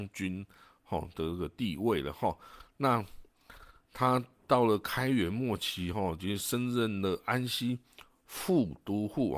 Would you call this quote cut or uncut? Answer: uncut